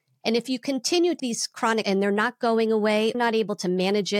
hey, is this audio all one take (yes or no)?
no